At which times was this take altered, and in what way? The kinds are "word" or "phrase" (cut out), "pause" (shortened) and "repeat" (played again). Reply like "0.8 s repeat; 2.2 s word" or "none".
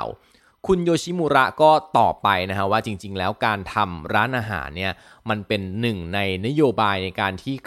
none